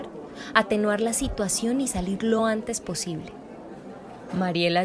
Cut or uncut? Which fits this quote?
uncut